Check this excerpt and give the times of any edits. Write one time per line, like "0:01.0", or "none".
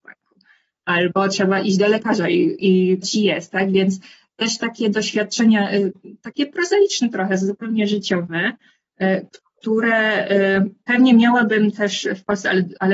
0:03.0